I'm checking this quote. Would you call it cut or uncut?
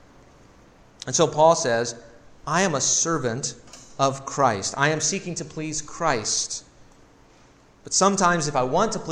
uncut